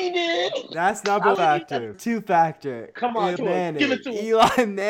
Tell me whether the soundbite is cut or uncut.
cut